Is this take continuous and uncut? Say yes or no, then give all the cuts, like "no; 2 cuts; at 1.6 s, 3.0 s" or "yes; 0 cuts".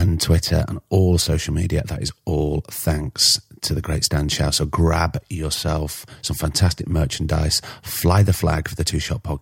yes; 0 cuts